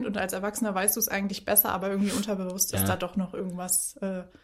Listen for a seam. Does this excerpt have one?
no; 0 cuts

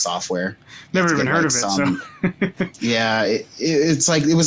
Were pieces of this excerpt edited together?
no; 0 cuts

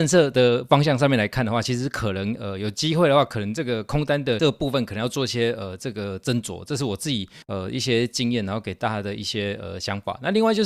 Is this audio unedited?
no; 1 cut; at 7.4 s

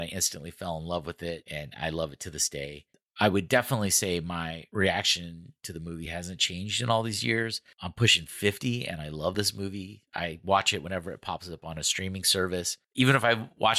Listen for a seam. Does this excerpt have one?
no; 0 cuts

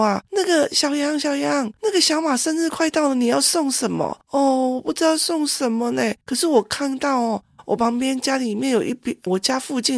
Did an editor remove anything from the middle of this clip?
yes; 1 cut; at 4.2 s

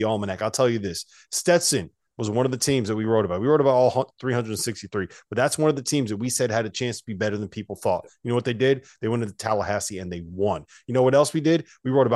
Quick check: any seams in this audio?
no; 0 cuts

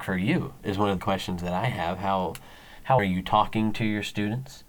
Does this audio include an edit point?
yes; 2 cuts; at 1.0 s, 3.0 s

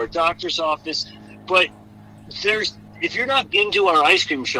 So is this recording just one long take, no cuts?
no; 1 cut; at 3.5 s

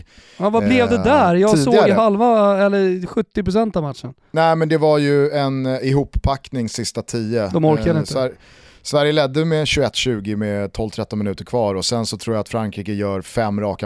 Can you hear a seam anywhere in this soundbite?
no; 0 cuts

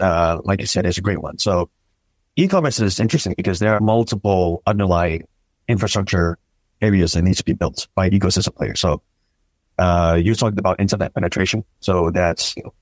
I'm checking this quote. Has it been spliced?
yes; 1 cut; at 3.8 s

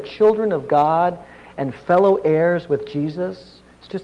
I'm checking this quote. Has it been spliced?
no; 0 cuts

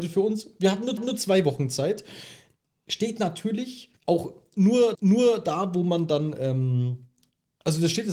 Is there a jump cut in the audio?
yes; 3 cuts; at 1.0 s, 4.0 s, 4.9 s

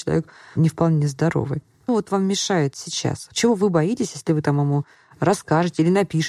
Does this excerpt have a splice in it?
yes; 1 cut; at 1.9 s

